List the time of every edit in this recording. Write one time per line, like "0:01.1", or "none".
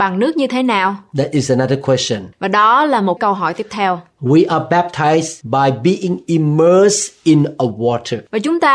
0:03.2